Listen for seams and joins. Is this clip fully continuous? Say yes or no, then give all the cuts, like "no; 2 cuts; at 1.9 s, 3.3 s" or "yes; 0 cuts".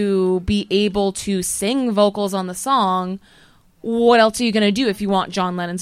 yes; 0 cuts